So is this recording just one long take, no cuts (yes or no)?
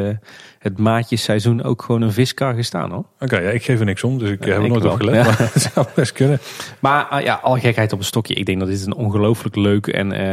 yes